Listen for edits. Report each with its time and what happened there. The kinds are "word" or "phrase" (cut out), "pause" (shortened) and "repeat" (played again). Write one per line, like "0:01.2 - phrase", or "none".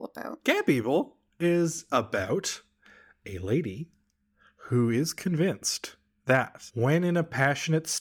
none